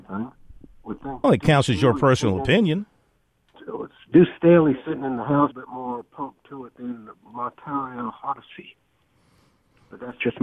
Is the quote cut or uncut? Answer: cut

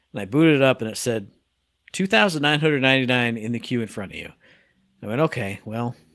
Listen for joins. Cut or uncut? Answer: uncut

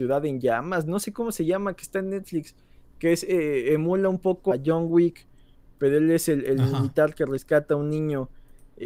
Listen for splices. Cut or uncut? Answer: cut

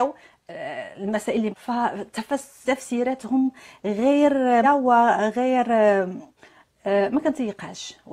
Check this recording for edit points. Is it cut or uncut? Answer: cut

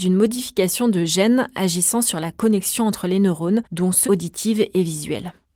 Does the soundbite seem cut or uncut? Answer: cut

